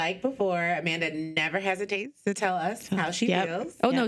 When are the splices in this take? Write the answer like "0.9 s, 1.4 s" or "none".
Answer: none